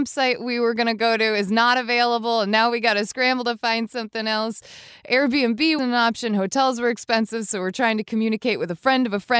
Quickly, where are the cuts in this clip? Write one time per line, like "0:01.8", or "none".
0:05.8